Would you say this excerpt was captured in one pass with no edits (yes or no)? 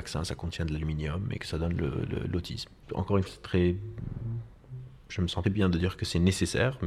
no